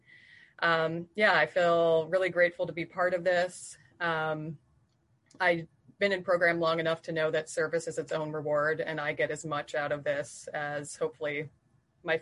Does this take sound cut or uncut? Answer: uncut